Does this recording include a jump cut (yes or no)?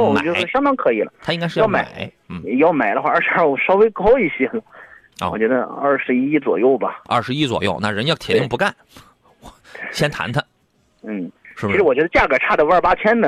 no